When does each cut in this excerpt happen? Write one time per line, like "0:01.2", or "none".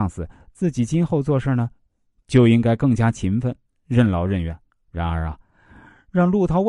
0:04.7